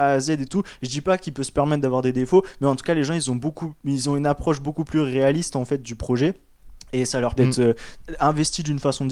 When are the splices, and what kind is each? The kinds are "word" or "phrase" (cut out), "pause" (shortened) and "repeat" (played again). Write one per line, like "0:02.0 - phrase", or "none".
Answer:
0:07.4 - word